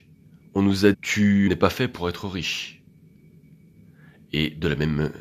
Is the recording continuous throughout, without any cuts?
no; 2 cuts; at 0.9 s, 1.5 s

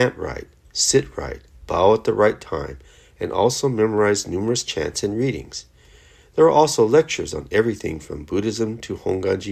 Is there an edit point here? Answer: no; 0 cuts

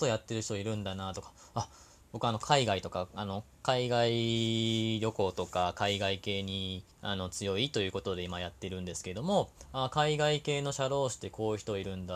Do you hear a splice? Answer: yes; 2 cuts; at 2.0 s, 6.9 s

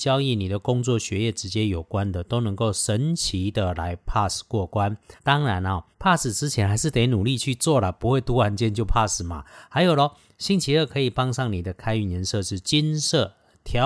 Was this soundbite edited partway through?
yes; 2 cuts; at 5.2 s, 5.9 s

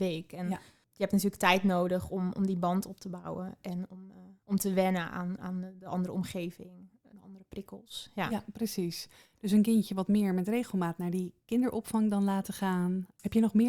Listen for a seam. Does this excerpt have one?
no; 0 cuts

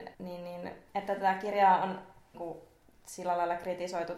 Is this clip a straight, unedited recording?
no; 1 cut; at 2.3 s

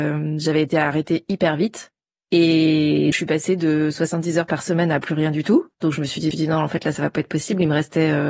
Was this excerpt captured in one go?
no; 3 cuts; at 3.1 s, 5.7 s, 6.3 s

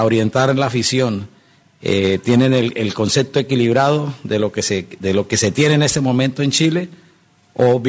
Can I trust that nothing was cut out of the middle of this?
yes; 0 cuts

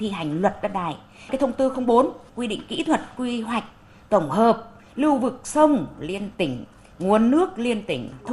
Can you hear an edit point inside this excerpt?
no; 0 cuts

